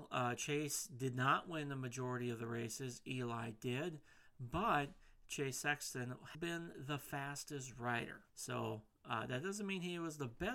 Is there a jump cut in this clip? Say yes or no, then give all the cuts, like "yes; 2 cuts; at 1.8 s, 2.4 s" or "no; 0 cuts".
yes; 2 cuts; at 6.3 s, 8.3 s